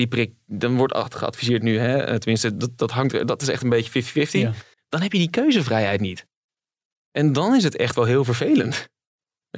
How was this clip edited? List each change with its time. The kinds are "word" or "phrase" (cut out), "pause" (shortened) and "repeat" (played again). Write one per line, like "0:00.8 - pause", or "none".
0:04.7 - pause